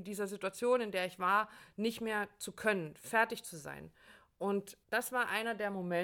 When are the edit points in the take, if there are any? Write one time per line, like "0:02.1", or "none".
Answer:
0:04.8